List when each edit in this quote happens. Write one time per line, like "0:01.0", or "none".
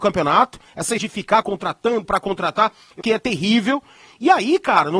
0:01.0
0:01.4
0:02.0
0:03.0